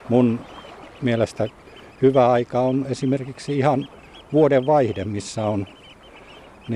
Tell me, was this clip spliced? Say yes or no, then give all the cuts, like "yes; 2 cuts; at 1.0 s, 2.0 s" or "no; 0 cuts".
no; 0 cuts